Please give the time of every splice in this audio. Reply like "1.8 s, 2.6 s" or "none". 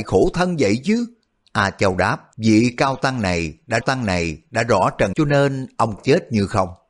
1.3 s, 2.3 s, 3.8 s, 5.1 s, 6.0 s